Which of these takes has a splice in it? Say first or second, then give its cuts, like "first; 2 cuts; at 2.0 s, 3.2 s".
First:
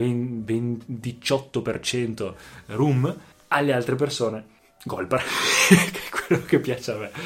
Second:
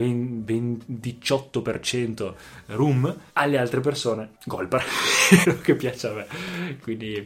second; 3 cuts; at 3.3 s, 4.3 s, 5.4 s